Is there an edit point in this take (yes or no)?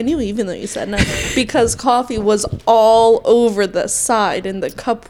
no